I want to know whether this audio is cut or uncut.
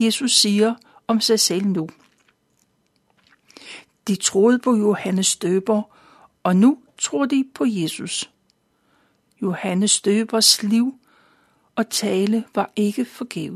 uncut